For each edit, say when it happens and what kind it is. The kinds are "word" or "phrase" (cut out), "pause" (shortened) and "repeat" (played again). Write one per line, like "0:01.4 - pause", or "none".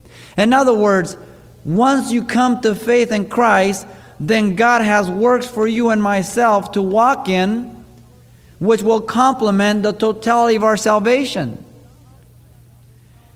none